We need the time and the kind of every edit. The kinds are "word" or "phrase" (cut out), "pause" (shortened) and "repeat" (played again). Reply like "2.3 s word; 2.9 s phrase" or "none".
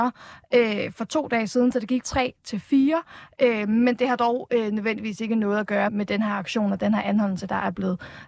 2.0 s word; 5.9 s word